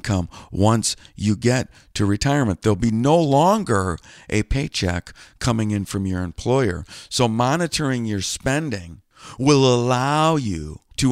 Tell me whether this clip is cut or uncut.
uncut